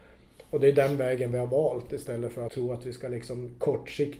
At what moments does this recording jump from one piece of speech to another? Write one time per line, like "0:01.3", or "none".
0:02.5